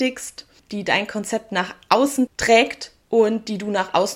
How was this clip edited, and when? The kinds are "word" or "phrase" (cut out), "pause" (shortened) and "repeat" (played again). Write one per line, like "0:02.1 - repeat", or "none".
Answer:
none

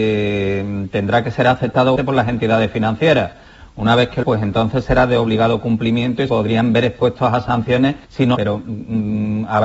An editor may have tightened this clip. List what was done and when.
0:02.0 - word
0:04.2 - word
0:06.3 - word
0:08.0 - pause
0:08.3 - phrase

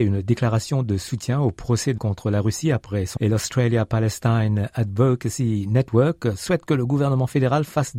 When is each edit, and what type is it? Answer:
0:02.0 - word
0:03.2 - word

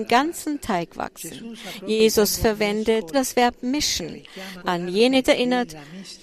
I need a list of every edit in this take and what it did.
0:03.1 - word
0:04.6 - word
0:05.2 - word

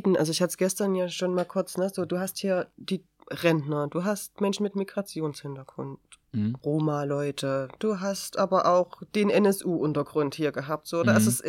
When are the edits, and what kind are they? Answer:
none

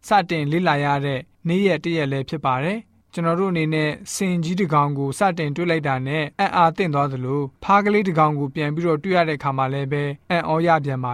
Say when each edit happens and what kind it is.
0:06.3 - pause
0:07.6 - pause
0:10.2 - pause

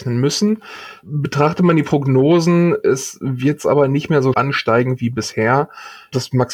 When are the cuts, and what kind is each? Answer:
0:04.3 - word

